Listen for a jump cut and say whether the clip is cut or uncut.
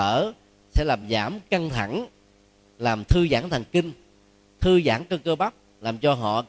uncut